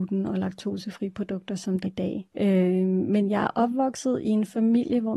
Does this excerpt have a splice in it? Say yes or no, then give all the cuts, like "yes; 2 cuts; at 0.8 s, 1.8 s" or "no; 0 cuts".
yes; 2 cuts; at 1.8 s, 2.3 s